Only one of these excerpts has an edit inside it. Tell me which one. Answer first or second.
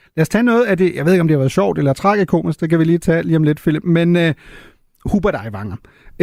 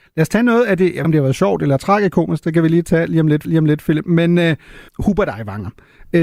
second